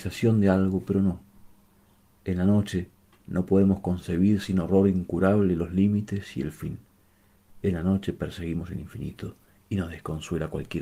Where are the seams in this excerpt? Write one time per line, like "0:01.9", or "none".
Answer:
none